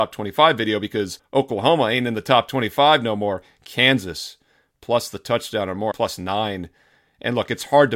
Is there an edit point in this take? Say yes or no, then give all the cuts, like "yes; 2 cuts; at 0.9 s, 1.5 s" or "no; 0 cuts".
yes; 2 cuts; at 1.2 s, 5.9 s